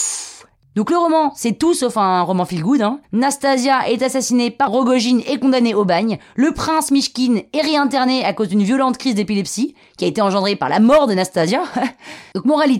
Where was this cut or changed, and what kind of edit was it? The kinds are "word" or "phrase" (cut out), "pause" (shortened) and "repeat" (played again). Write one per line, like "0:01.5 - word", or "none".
0:03.0 - pause
0:04.7 - word